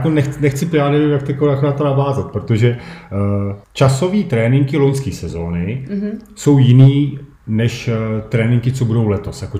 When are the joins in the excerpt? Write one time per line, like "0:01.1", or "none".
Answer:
0:03.6
0:07.4